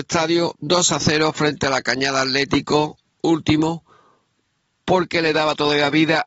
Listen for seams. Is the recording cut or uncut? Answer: uncut